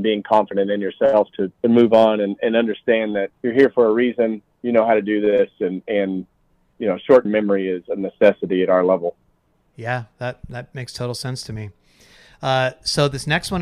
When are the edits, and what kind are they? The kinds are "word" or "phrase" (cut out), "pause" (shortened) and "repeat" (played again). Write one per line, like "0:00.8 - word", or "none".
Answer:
0:01.5 - pause
0:03.3 - pause
0:06.7 - word
0:07.2 - word